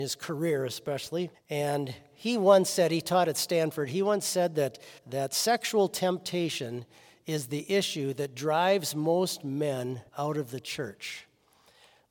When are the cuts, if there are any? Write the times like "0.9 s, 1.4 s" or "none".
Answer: 1.3 s, 5.0 s, 10.1 s